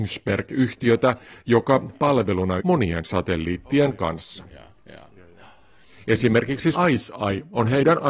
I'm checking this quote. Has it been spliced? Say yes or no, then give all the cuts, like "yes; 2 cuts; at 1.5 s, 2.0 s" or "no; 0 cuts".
yes; 3 cuts; at 1.9 s, 2.6 s, 6.7 s